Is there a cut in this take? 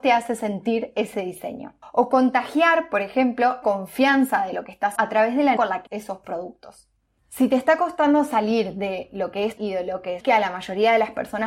yes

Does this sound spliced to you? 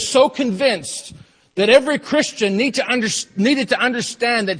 no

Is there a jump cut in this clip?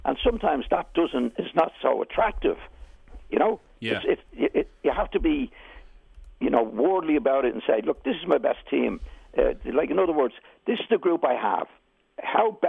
no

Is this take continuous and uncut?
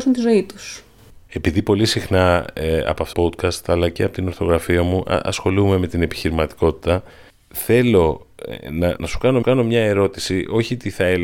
no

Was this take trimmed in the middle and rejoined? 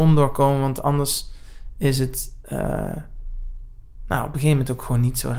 no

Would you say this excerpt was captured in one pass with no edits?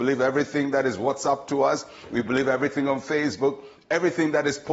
yes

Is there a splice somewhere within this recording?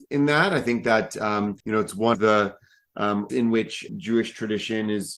yes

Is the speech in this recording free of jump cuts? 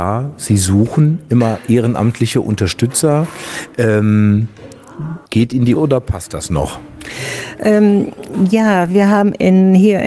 no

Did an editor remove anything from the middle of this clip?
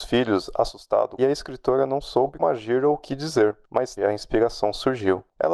yes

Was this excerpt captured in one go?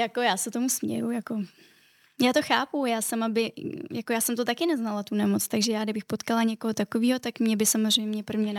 yes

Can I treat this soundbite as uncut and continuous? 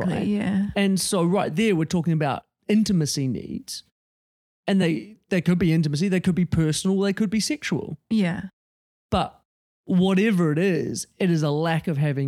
yes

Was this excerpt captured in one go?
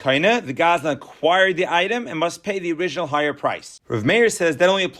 yes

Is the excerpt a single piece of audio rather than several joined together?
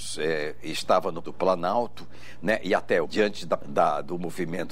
no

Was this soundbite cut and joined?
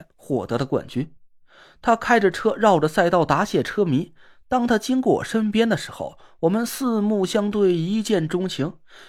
no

